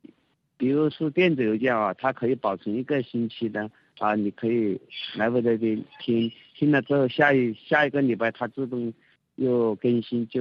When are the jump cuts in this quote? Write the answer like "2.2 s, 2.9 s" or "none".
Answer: none